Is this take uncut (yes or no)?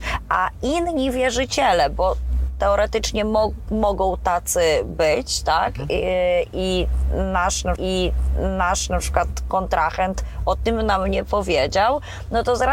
no